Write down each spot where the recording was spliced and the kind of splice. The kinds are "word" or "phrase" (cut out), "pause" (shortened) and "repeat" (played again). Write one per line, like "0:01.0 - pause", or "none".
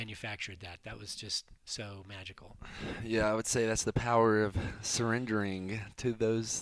0:01.6 - pause